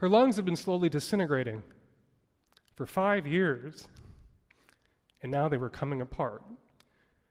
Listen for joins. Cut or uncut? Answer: uncut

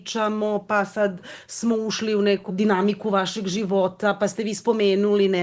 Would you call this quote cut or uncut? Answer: cut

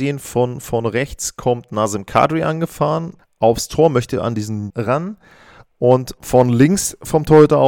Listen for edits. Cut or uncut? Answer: cut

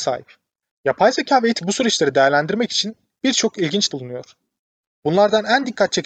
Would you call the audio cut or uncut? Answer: cut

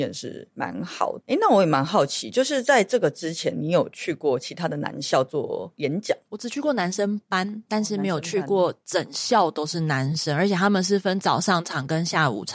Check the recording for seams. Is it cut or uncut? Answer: cut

